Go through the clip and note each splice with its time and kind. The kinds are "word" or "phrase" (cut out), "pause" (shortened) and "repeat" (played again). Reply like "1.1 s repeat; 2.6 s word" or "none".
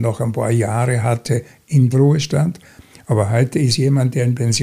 1.9 s word